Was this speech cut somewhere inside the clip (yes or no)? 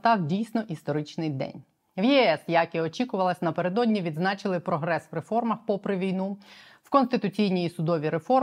no